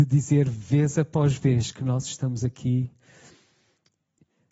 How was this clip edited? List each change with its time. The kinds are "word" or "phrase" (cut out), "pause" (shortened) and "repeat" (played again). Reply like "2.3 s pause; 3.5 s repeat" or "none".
none